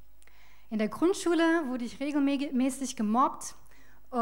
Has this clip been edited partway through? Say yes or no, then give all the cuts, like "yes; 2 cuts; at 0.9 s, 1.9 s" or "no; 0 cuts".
no; 0 cuts